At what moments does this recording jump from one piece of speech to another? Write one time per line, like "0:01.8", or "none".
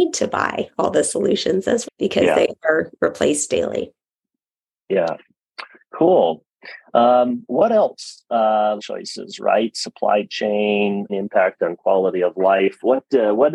0:01.8
0:08.8
0:11.1